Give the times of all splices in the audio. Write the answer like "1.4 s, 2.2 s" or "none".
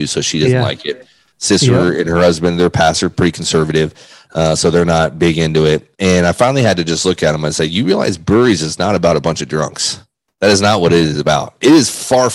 none